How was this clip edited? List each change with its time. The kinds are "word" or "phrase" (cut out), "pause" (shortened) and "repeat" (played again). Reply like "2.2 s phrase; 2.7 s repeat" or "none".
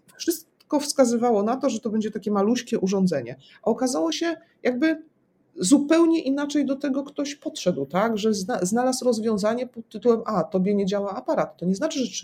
4.1 s phrase